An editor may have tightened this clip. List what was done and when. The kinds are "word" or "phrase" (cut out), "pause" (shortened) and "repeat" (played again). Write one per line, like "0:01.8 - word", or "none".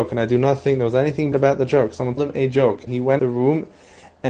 0:01.3 - word
0:02.2 - word
0:02.9 - word
0:03.2 - word